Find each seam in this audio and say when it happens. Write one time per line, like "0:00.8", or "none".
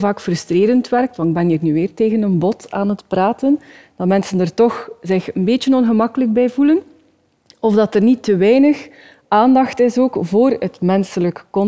none